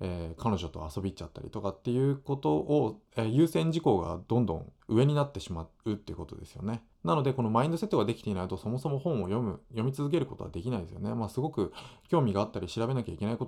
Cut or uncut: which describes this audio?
cut